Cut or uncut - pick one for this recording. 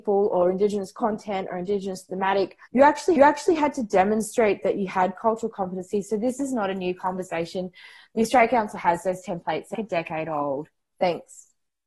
cut